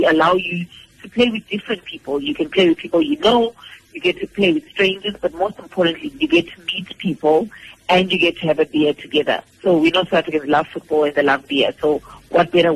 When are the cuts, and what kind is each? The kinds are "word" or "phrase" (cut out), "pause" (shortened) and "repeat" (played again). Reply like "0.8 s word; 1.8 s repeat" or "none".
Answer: 9.5 s pause